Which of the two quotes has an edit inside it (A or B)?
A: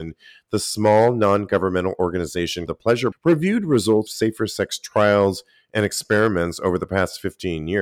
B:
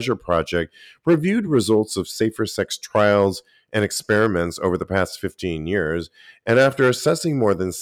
A